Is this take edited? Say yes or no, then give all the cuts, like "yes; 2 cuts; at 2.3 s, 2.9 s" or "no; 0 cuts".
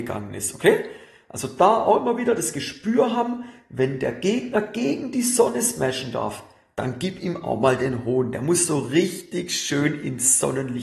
no; 0 cuts